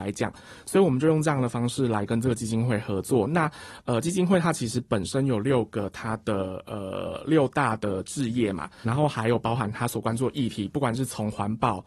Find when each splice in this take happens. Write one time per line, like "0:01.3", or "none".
0:08.8